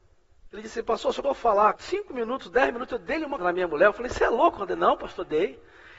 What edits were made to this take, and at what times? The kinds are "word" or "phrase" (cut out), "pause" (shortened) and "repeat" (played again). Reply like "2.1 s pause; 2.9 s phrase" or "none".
1.2 s word; 1.7 s word; 3.4 s word